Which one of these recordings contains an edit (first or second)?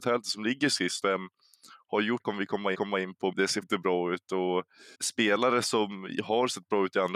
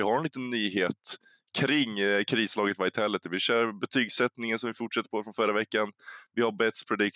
first